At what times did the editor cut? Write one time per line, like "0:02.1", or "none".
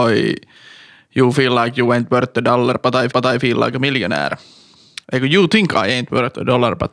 0:03.1
0:05.0